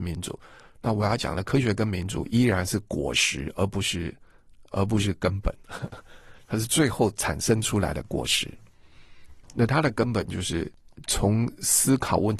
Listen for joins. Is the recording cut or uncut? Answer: cut